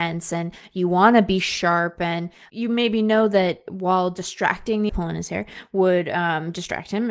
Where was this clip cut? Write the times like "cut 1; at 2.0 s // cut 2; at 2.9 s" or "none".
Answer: cut 1; at 4.9 s